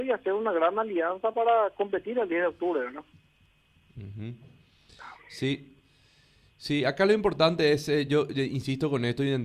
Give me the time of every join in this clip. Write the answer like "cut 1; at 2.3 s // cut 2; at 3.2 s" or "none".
none

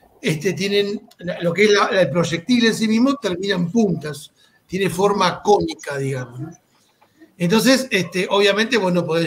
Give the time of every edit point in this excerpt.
none

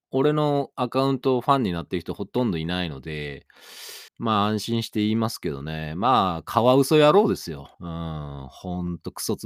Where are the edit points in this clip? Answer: cut 1; at 4.1 s // cut 2; at 7.7 s

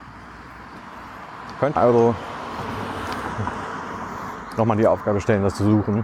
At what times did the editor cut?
cut 1; at 1.8 s

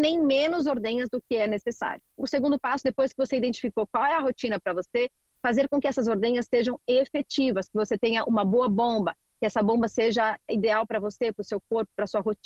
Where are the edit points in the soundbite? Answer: none

